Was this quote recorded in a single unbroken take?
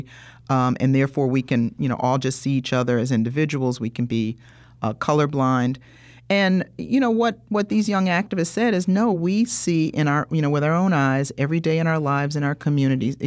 yes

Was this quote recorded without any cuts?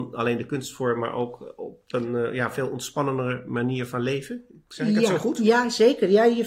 yes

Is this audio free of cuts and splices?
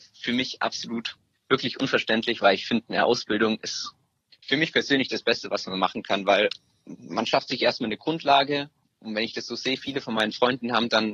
yes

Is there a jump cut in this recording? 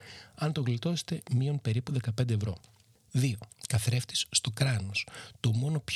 no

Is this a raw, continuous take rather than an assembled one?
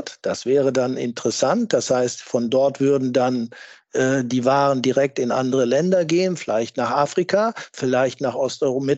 yes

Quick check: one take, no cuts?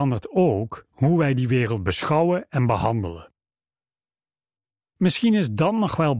yes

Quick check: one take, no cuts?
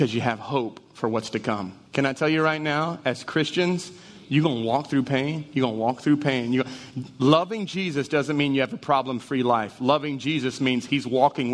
no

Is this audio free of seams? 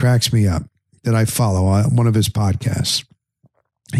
yes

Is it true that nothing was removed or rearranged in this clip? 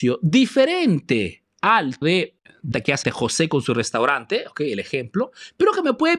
no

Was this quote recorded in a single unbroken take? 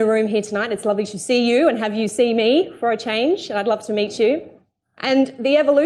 yes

